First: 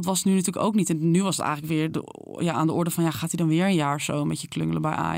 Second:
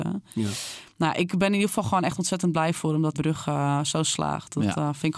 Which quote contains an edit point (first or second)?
second